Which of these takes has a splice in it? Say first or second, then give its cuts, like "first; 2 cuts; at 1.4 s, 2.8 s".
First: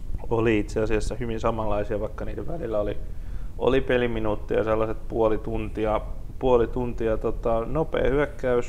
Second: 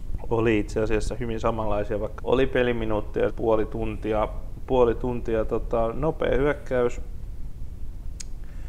second; 2 cuts; at 2.2 s, 3.3 s